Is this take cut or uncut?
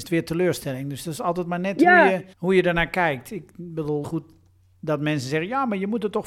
cut